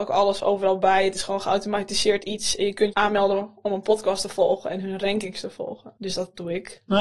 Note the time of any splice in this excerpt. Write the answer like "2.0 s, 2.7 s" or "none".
2.9 s